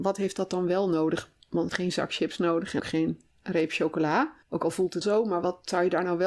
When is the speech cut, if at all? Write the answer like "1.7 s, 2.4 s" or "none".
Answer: 1.7 s, 2.8 s, 3.3 s, 4.4 s, 5.0 s